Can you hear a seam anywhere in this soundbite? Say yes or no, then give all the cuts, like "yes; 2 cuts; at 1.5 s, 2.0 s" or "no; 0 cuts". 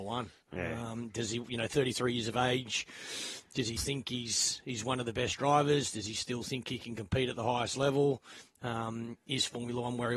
yes; 1 cut; at 3.8 s